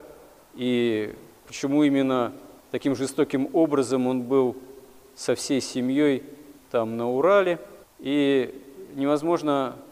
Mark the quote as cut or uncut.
cut